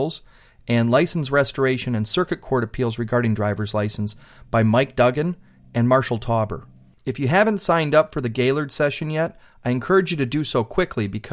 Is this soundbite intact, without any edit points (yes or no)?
yes